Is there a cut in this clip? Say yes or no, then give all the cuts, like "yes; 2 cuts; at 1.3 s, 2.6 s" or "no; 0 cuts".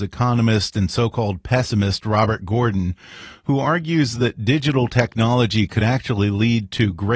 no; 0 cuts